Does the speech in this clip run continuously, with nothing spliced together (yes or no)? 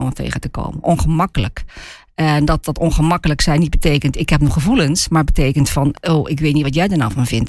yes